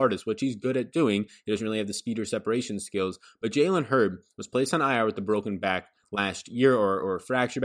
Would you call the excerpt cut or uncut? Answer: uncut